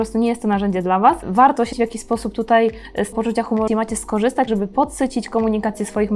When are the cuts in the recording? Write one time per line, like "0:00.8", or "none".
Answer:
0:01.7
0:03.1
0:03.7
0:04.5